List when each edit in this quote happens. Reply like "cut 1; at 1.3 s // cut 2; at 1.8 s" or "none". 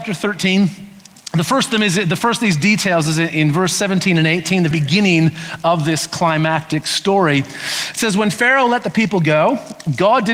cut 1; at 4.7 s